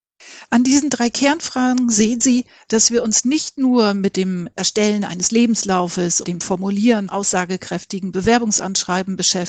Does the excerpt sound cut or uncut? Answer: cut